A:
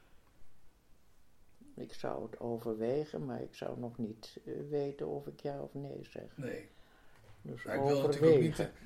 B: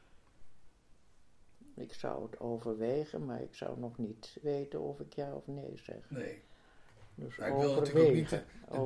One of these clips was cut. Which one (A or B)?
B